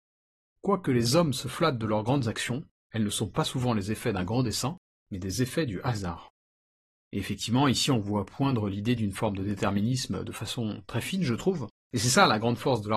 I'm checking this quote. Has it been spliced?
no; 0 cuts

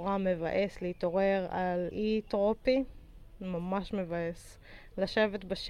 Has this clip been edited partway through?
yes; 1 cut; at 1.9 s

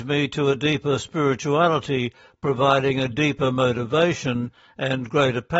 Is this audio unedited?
yes; 0 cuts

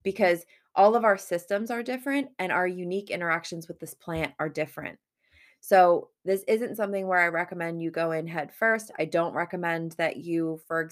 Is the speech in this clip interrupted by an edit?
no; 0 cuts

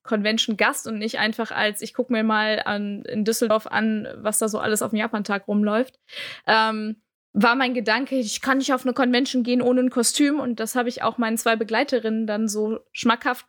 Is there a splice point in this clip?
yes; 1 cut; at 7.1 s

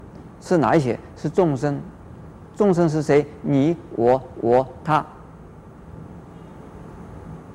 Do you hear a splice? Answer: yes; 1 cut; at 4.3 s

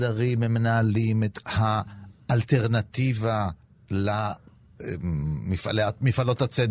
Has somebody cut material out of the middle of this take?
yes; 1 cut; at 1.4 s

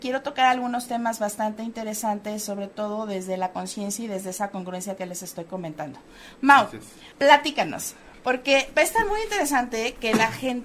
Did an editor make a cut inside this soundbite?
yes; 1 cut; at 7.1 s

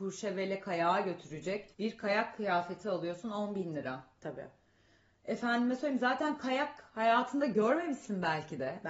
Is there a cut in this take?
yes; 1 cut; at 1.7 s

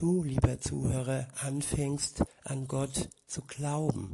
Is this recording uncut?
no; 1 cut; at 2.3 s

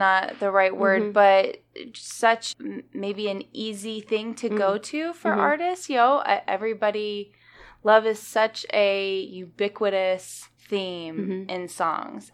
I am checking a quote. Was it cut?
yes; 2 cuts; at 2.5 s, 10.6 s

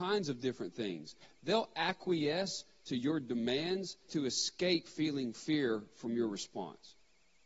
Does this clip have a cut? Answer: yes; 1 cut; at 4.1 s

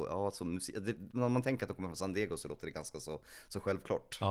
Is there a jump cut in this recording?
no; 0 cuts

